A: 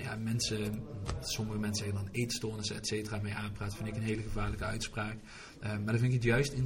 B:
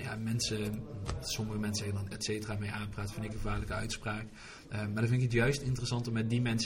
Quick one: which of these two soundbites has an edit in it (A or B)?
B